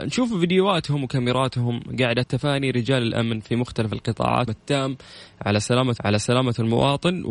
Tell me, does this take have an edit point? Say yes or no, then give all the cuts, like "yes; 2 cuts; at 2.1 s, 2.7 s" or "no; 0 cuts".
yes; 3 cuts; at 2.2 s, 4.5 s, 6.0 s